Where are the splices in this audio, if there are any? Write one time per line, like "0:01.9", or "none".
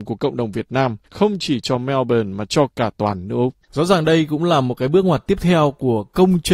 0:01.0
0:03.6